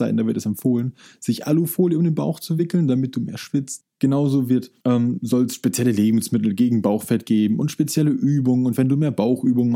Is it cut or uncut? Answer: uncut